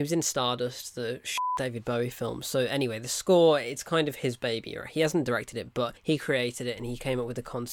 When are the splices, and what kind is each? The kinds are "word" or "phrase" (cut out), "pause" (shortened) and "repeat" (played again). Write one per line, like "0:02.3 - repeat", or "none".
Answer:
0:06.0 - pause